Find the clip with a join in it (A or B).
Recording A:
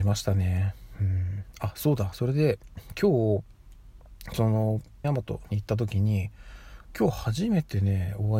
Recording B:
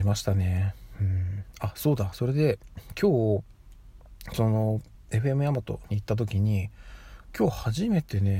A